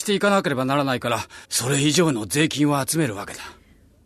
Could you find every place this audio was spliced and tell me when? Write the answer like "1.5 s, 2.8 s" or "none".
1.4 s